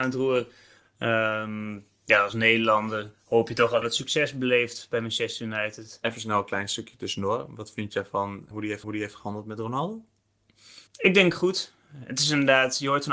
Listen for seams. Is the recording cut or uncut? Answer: cut